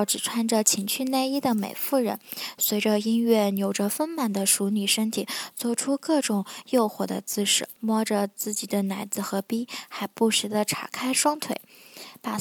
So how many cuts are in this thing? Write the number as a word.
one